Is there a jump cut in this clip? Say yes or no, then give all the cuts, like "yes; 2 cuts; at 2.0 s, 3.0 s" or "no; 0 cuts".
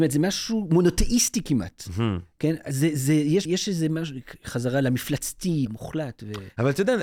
yes; 2 cuts; at 3.4 s, 5.7 s